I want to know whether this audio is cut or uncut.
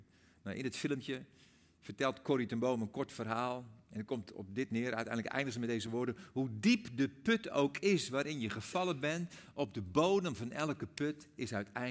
uncut